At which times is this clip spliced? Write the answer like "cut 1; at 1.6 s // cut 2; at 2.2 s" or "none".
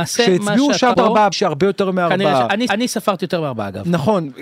cut 1; at 0.9 s // cut 2; at 1.3 s // cut 3; at 2.7 s